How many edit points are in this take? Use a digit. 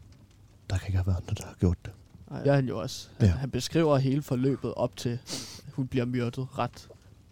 1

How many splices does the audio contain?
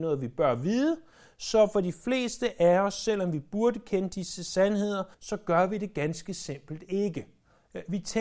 1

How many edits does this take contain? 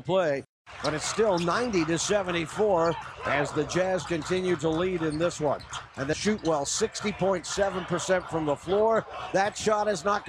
1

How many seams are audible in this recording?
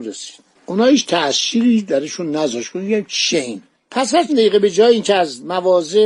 2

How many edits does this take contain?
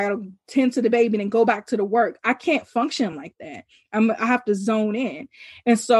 0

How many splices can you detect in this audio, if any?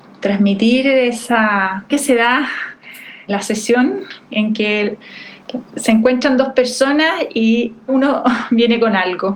4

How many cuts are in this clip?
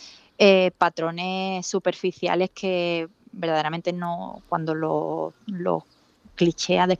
0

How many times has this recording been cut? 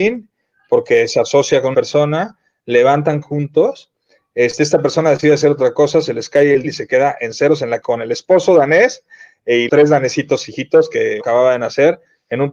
6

